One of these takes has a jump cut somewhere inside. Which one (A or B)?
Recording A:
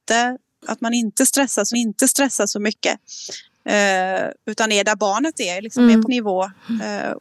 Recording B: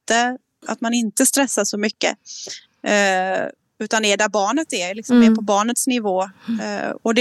A